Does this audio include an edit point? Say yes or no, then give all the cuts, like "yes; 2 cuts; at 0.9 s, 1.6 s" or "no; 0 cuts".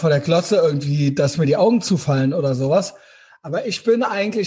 no; 0 cuts